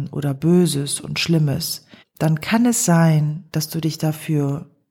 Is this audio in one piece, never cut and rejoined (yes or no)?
no